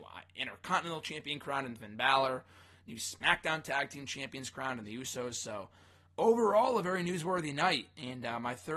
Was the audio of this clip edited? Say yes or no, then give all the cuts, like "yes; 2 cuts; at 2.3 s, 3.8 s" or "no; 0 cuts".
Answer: no; 0 cuts